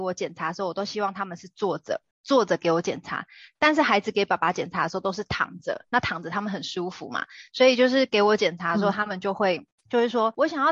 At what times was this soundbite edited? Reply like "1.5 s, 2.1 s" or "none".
2.1 s